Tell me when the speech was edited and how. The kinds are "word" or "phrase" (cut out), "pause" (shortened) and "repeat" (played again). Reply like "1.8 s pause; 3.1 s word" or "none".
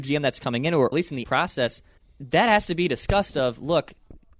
0.9 s phrase; 1.2 s word; 2.0 s pause